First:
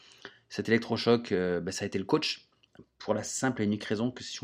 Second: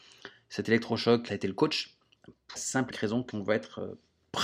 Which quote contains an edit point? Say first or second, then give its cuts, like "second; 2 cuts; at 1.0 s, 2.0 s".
second; 4 cuts; at 1.3 s, 2.6 s, 2.9 s, 3.3 s